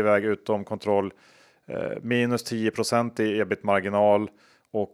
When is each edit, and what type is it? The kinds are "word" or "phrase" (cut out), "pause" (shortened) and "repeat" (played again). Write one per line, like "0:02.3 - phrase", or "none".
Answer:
none